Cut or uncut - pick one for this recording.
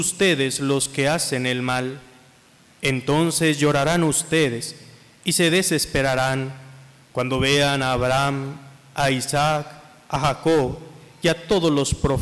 uncut